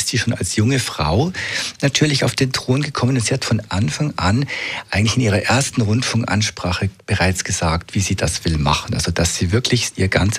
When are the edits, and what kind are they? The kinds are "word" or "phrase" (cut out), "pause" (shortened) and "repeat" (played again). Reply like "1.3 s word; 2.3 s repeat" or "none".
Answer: none